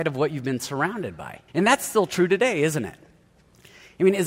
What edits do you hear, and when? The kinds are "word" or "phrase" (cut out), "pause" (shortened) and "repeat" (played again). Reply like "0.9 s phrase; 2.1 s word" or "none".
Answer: 1.5 s pause